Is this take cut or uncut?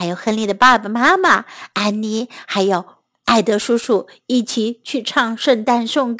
uncut